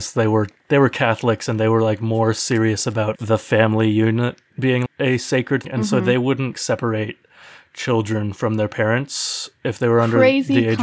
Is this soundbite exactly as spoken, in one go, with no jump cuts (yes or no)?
no